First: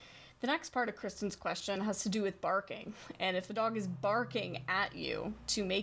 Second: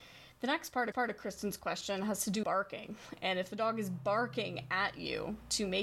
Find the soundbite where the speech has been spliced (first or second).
second